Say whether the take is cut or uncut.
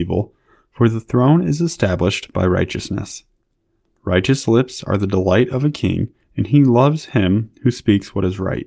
uncut